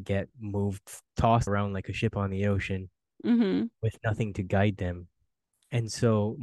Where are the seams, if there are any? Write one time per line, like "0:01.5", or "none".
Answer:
0:01.5